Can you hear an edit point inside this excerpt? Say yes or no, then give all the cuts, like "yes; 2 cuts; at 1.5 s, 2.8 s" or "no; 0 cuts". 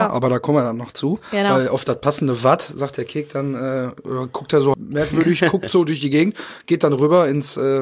yes; 1 cut; at 4.7 s